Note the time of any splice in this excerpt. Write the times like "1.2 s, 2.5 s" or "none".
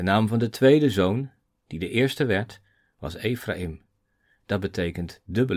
none